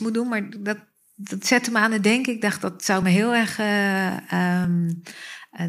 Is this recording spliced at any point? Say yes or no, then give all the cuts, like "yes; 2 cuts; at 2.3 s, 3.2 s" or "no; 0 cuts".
no; 0 cuts